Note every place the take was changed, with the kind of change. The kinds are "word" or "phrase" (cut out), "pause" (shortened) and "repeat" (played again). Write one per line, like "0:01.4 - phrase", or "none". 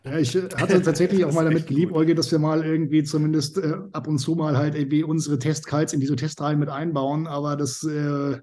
none